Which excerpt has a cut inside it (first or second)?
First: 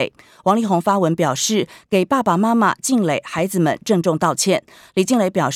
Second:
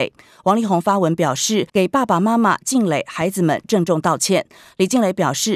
second